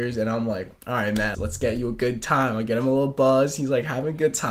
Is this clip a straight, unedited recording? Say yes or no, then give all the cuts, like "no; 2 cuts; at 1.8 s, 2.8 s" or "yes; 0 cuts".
no; 1 cut; at 1.3 s